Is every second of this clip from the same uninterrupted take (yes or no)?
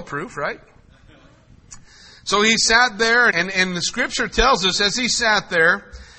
no